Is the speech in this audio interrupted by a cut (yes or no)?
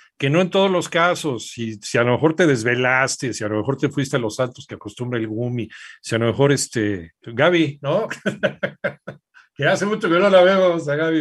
no